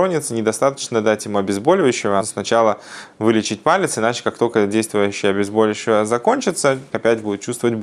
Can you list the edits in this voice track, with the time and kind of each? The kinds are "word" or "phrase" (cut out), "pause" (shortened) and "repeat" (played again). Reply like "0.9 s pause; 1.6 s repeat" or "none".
2.2 s phrase; 6.9 s word